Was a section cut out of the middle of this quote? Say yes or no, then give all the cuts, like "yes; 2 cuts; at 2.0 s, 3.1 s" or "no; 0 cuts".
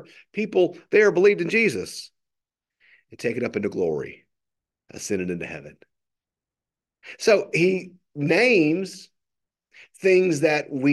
no; 0 cuts